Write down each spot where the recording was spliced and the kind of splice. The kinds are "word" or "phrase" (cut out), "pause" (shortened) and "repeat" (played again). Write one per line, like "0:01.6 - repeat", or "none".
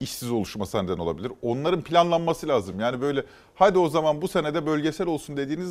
none